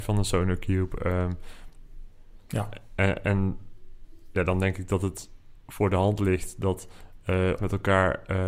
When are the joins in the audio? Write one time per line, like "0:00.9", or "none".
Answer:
0:07.6